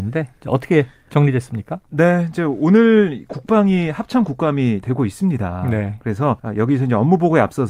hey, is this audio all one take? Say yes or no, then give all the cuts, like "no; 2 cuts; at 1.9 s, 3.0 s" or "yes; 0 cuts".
no; 3 cuts; at 3.3 s, 4.8 s, 6.4 s